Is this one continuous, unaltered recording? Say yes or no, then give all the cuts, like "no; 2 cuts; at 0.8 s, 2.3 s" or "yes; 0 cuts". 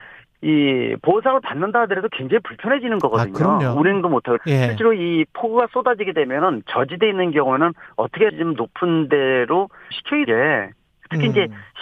no; 4 cuts; at 4.4 s, 8.3 s, 9.9 s, 10.2 s